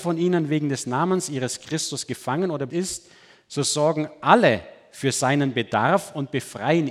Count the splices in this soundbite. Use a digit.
1